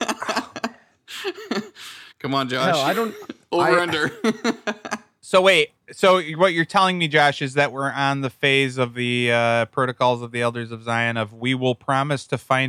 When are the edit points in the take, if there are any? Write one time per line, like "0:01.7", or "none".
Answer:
0:02.1